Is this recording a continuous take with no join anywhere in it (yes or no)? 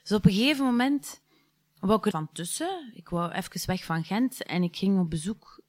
no